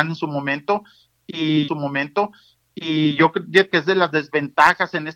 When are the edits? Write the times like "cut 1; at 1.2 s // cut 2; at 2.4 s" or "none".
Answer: cut 1; at 1.7 s // cut 2; at 3.7 s